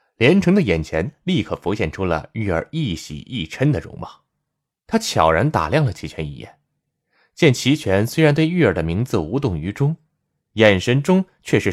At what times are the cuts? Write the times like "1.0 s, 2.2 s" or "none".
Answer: none